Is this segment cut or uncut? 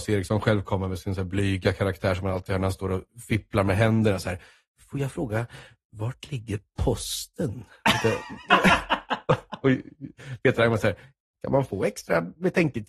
uncut